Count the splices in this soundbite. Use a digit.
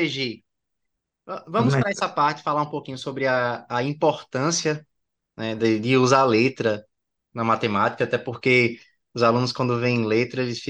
0